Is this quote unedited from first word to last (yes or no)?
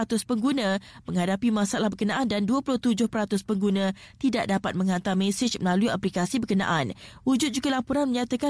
yes